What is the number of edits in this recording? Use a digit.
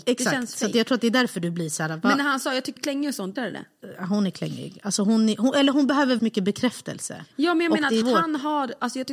4